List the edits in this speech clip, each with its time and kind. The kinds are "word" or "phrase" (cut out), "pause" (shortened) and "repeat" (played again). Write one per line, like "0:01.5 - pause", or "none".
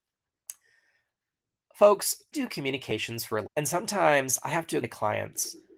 0:02.3 - word
0:03.4 - word
0:04.8 - word